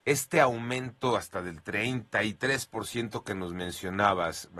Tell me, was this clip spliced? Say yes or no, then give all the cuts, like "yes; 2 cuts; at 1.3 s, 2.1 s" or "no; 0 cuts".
no; 0 cuts